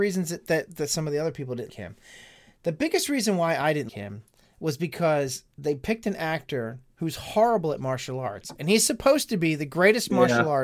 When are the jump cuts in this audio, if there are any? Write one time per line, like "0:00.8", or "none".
0:01.7
0:03.9